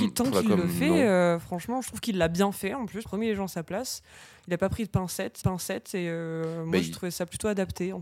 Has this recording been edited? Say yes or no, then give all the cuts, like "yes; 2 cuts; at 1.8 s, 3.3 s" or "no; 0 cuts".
yes; 2 cuts; at 3.1 s, 5.4 s